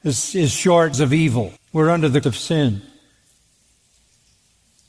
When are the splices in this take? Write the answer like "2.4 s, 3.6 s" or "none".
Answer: 0.9 s, 1.6 s, 2.2 s